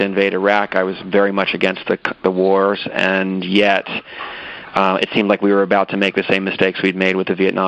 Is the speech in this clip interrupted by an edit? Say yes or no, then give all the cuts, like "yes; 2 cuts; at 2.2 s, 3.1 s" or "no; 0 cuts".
no; 0 cuts